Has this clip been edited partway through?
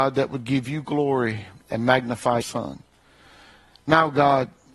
yes; 1 cut; at 2.4 s

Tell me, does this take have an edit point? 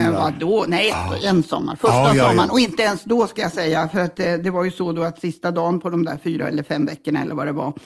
no; 0 cuts

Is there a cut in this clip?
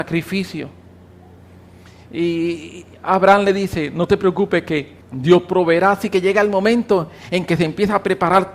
yes; 1 cut; at 5.0 s

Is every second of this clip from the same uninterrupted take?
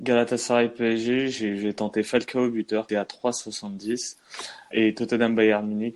no; 2 cuts; at 2.9 s, 4.7 s

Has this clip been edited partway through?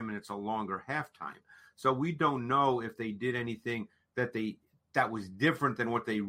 no; 0 cuts

